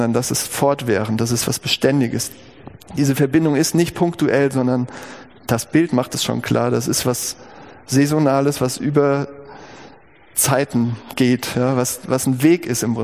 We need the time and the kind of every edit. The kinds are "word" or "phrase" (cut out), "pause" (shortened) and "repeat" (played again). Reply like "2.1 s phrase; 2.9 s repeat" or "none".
none